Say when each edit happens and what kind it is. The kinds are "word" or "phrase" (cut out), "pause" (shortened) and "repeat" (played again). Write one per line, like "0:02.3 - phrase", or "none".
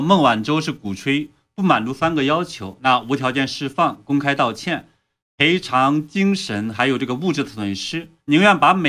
none